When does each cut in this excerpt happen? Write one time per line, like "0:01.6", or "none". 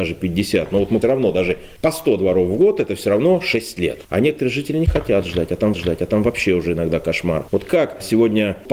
0:01.0
0:05.7